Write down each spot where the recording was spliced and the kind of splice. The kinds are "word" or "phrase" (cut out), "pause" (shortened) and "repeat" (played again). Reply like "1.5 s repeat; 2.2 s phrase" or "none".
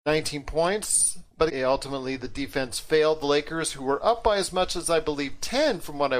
1.5 s word